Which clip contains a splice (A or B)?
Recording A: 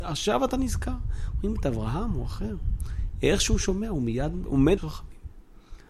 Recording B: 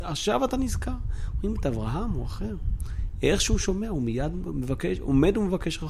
A